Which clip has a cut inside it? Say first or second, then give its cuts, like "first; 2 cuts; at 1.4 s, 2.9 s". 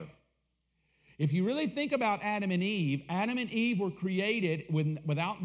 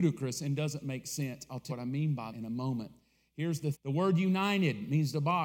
second; 3 cuts; at 1.7 s, 2.3 s, 3.7 s